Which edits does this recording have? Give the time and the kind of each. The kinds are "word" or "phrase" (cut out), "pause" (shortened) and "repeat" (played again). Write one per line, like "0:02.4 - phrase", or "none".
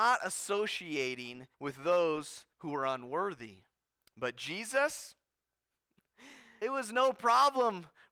0:01.5 - pause
0:02.5 - pause
0:04.0 - pause
0:06.6 - word